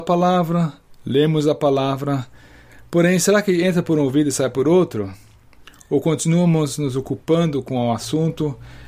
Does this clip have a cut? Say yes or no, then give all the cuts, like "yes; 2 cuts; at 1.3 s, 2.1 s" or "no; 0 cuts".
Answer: no; 0 cuts